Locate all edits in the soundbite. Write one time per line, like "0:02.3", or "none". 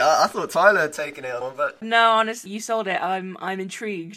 0:01.4
0:01.8
0:02.5